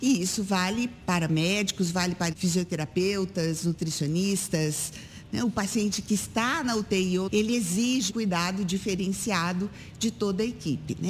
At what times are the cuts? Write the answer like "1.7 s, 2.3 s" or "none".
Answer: 2.3 s, 7.3 s, 8.1 s